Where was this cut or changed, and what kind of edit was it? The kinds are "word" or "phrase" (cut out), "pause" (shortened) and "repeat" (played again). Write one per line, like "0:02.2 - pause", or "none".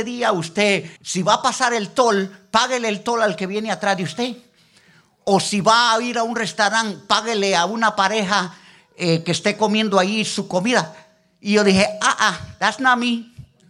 0:01.0 - pause